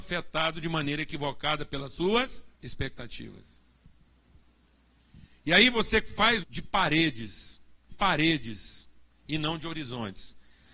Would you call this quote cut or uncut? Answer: cut